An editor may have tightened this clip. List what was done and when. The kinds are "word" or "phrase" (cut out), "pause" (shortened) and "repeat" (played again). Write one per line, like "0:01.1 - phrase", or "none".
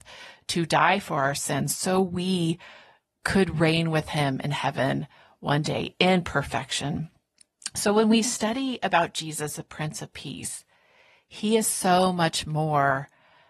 none